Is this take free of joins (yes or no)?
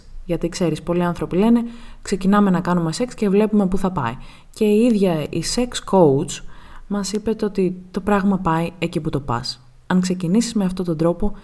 yes